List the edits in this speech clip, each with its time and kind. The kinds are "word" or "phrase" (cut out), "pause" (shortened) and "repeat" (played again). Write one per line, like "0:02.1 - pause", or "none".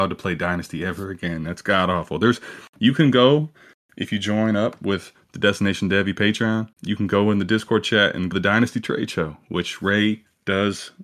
0:06.7 - pause
0:08.3 - phrase

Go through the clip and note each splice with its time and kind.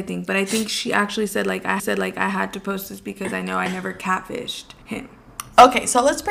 0:01.8 - repeat
0:04.8 - pause

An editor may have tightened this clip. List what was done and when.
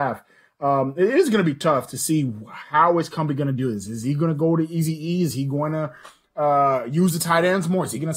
none

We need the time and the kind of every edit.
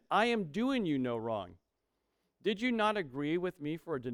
none

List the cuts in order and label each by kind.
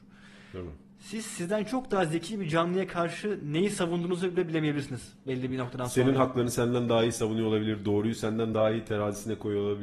none

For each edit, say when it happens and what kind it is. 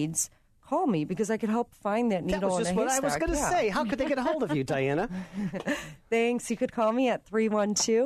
none

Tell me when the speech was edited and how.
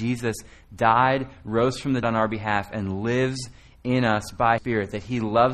0:02.0 - word
0:04.6 - word

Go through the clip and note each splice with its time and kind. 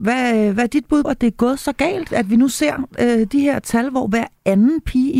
0:01.0 - word
0:02.1 - word

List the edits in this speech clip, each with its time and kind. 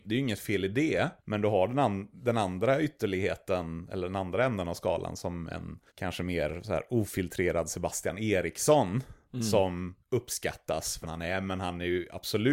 0:01.2 - pause
0:05.9 - pause
0:10.0 - pause
0:11.0 - word

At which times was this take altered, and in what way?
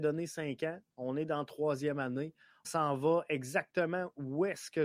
0:02.6 - word

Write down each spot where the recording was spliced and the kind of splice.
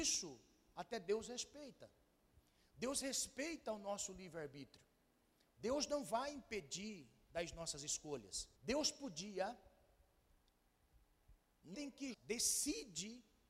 0:08.5 - pause
0:11.7 - word
0:12.1 - word

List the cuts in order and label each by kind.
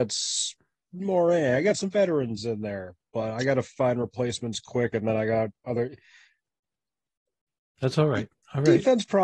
0:05.6 - pause

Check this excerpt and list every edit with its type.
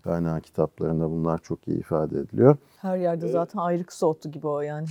none

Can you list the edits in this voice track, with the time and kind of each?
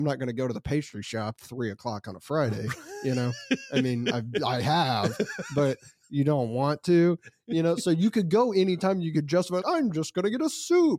0:01.3 - word
0:09.6 - word

